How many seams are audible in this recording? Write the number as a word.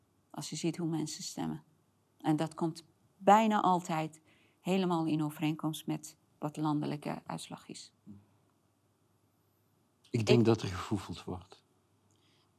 zero